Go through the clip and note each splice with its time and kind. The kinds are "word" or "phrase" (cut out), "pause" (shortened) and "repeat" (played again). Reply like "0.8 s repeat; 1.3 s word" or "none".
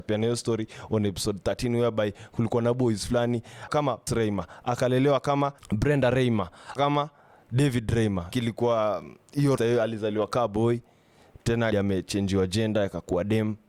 3.7 s word; 4.1 s word; 6.8 s word; 8.3 s word; 9.6 s word; 11.7 s word